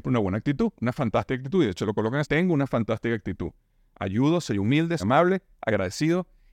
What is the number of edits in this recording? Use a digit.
2